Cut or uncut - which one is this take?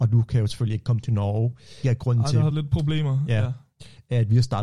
cut